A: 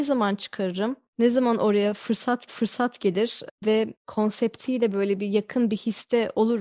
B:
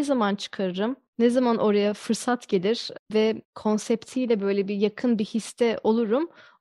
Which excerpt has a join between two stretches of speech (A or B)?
A